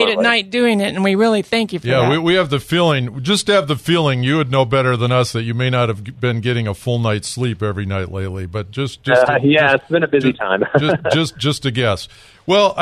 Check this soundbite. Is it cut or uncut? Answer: uncut